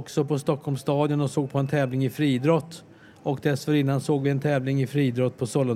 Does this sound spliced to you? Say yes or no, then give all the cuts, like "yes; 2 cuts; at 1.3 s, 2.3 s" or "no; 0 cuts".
no; 0 cuts